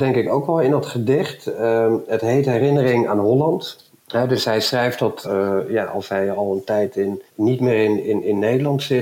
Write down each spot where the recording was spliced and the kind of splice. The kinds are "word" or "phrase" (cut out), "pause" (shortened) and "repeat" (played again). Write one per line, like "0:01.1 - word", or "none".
0:04.0 - pause
0:05.2 - word
0:07.3 - pause